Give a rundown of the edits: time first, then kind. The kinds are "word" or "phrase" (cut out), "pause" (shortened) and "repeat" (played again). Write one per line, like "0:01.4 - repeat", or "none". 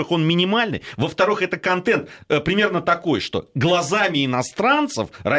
none